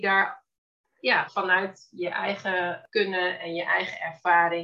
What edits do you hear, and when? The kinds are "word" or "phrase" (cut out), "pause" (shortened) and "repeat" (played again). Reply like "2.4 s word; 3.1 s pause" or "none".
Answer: 1.3 s word